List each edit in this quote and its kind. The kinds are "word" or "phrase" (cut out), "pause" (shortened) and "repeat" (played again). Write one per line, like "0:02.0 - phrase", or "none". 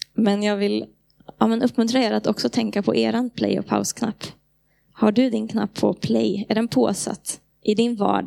none

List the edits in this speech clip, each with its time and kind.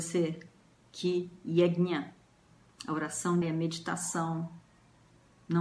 0:03.4 - word

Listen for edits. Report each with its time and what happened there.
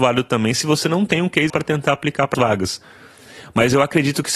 0:01.5 - word
0:02.3 - word

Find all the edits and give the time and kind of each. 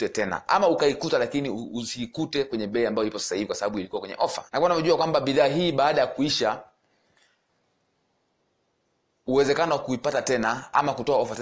0:04.5 - pause

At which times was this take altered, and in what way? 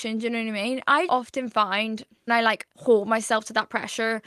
0:01.1 - word
0:02.3 - word
0:02.7 - pause

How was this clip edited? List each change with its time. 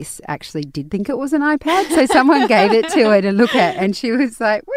none

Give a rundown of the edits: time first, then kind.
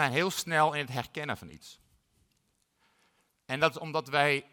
none

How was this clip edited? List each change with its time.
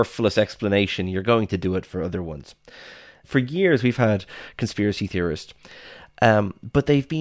none

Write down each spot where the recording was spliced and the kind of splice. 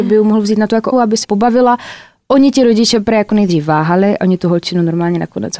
0:00.9 - word
0:01.2 - word

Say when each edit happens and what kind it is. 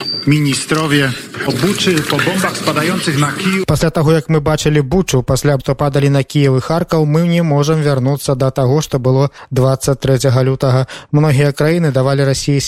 0:05.6 - word

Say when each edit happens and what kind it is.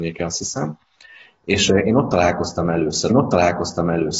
0:03.1 - repeat

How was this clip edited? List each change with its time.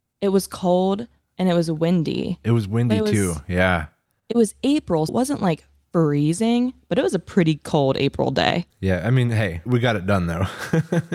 0:05.1 - word
0:09.7 - word

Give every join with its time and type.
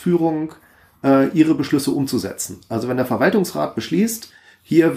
none

